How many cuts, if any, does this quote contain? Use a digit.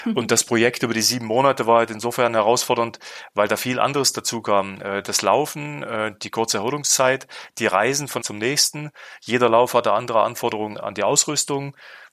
2